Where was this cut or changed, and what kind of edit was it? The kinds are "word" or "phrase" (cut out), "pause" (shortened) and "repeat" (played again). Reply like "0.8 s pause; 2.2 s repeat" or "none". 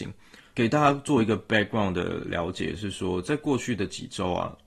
none